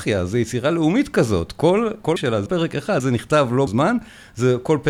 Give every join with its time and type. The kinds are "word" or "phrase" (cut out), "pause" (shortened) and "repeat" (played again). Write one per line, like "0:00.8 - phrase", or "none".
0:02.2 - word
0:02.5 - word
0:03.0 - word
0:03.7 - word